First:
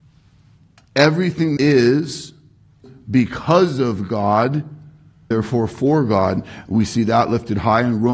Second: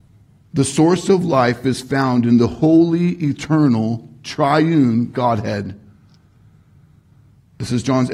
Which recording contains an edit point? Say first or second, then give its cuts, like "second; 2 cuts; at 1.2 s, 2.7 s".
first; 3 cuts; at 1.6 s, 2.8 s, 5.3 s